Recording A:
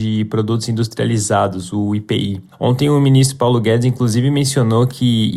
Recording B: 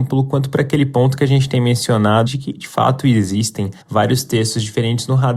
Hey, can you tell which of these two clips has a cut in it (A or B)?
B